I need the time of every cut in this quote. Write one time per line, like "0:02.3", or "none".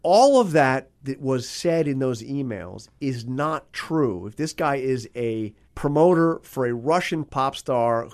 0:05.6